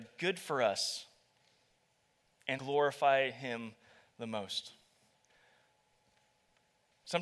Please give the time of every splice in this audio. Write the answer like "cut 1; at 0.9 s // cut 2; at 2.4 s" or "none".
cut 1; at 2.6 s